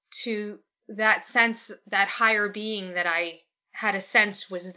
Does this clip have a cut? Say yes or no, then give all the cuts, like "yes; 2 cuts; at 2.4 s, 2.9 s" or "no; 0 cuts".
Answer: no; 0 cuts